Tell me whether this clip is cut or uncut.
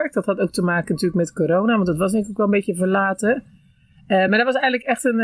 uncut